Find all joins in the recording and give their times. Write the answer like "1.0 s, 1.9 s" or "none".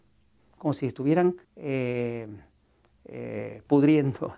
1.4 s

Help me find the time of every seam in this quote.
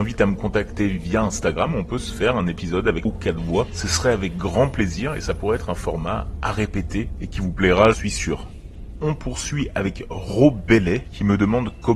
3.1 s, 7.9 s

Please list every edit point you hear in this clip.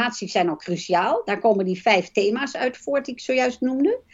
none

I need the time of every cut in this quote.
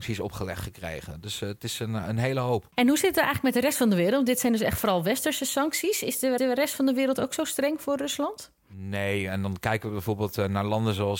6.4 s

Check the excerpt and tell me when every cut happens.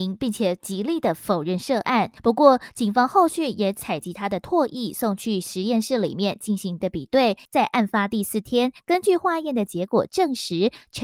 2.2 s, 6.8 s, 7.4 s

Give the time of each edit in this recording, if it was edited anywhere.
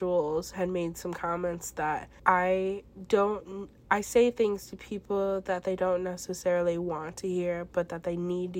2.2 s

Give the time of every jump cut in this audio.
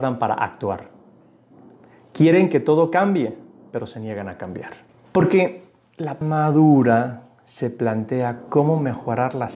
4.9 s, 6.2 s

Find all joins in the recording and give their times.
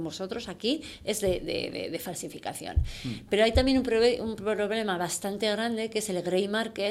none

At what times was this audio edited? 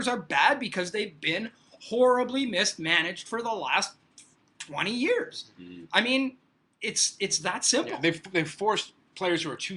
none

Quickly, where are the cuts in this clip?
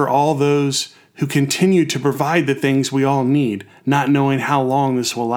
none

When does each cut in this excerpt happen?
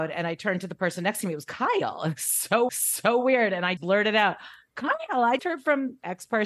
2.7 s, 3.8 s, 5.4 s

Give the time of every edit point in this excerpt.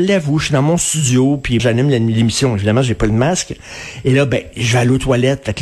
1.6 s

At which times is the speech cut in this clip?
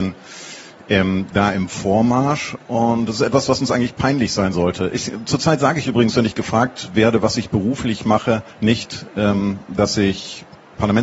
8.5 s

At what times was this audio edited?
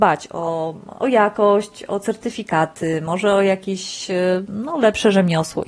none

